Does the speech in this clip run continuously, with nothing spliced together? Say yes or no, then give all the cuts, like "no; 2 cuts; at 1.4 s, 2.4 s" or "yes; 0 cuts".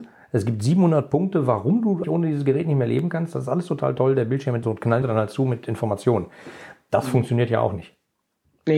no; 3 cuts; at 2.0 s, 4.6 s, 5.0 s